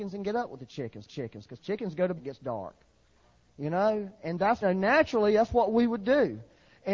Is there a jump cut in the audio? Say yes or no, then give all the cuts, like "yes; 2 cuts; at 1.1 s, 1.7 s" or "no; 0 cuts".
yes; 3 cuts; at 1.1 s, 2.2 s, 4.6 s